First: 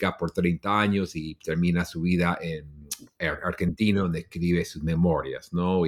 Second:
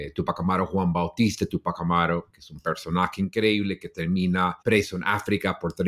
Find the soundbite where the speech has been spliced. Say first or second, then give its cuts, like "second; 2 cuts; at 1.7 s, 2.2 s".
second; 1 cut; at 4.6 s